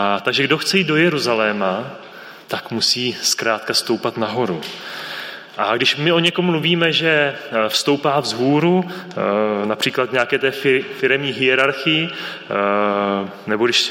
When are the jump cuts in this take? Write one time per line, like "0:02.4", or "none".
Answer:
0:02.4